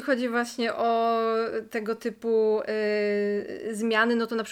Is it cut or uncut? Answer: uncut